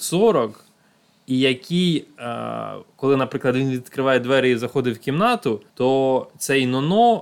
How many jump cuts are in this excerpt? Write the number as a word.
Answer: one